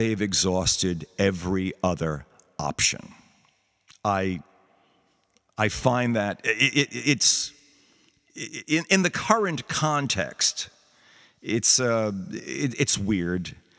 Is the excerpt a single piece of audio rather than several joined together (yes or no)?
yes